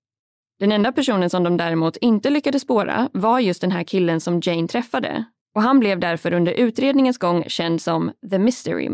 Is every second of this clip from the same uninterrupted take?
yes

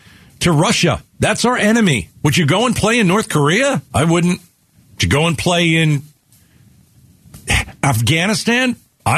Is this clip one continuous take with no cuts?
no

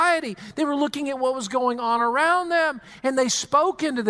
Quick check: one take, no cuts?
yes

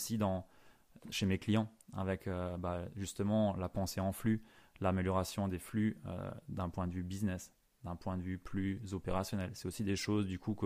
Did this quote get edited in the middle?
no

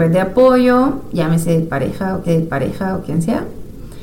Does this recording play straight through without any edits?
no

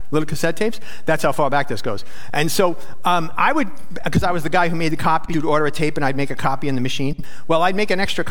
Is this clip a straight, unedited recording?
yes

